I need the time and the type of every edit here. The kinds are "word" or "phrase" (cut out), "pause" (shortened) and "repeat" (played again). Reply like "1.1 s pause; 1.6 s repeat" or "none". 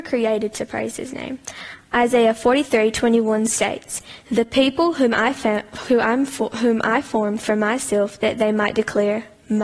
none

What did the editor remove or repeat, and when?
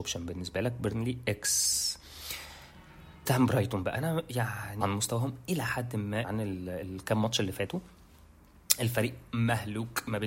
3.3 s word; 4.0 s word; 4.8 s phrase; 6.2 s word

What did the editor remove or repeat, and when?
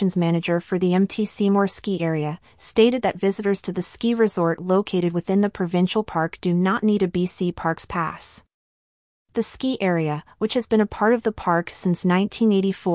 none

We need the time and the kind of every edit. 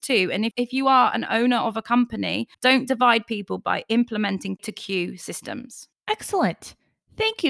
2.5 s pause; 4.6 s word

